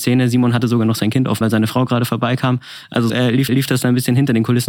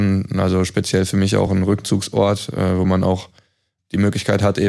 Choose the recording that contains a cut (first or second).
first